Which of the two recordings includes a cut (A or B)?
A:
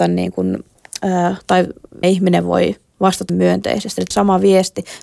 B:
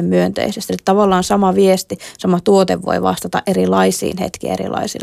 A